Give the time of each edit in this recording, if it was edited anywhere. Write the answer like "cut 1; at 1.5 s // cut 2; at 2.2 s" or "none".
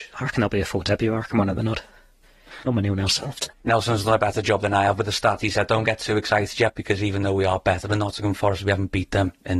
cut 1; at 1.6 s // cut 2; at 2.6 s // cut 3; at 3.5 s